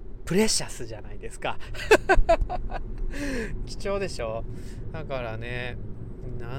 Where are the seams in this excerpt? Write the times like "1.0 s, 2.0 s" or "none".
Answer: 3.6 s